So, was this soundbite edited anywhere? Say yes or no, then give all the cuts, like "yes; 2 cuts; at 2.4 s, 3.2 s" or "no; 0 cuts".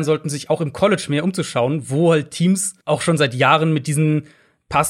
yes; 1 cut; at 2.8 s